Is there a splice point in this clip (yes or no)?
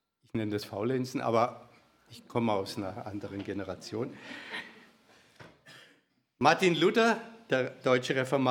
no